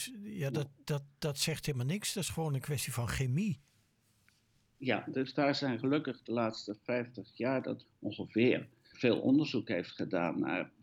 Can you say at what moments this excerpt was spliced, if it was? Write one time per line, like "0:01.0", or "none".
0:07.8
0:08.9